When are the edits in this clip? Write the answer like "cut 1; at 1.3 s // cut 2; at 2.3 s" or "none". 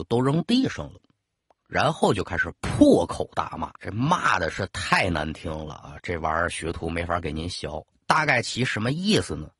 cut 1; at 3.8 s